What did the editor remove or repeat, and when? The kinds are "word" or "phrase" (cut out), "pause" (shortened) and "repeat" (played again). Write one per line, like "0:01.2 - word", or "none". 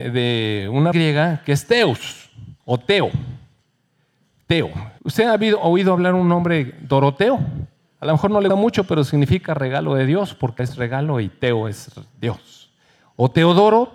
0:00.9 - word
0:02.6 - pause
0:05.0 - pause
0:07.8 - pause
0:08.5 - word
0:10.6 - word